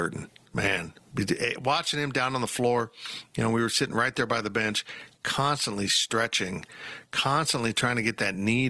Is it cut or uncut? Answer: uncut